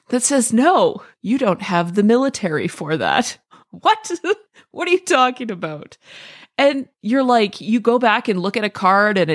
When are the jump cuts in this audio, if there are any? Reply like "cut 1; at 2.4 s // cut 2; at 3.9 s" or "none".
none

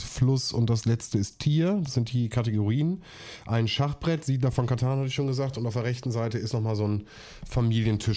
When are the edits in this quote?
none

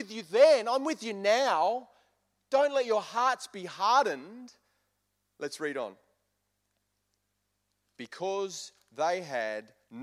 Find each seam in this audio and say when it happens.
none

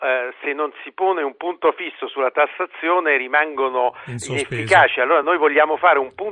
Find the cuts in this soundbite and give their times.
none

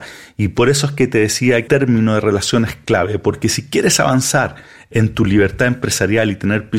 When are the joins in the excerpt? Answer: cut 1; at 1.7 s

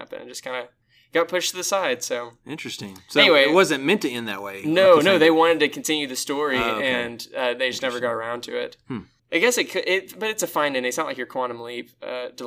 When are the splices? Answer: none

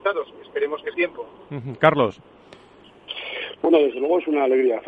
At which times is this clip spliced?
cut 1; at 0.9 s

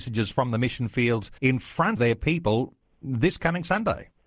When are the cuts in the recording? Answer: cut 1; at 1.4 s // cut 2; at 2.0 s

